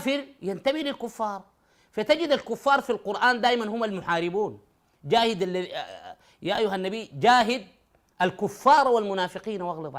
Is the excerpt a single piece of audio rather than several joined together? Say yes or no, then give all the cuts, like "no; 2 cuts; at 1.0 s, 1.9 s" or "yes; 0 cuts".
yes; 0 cuts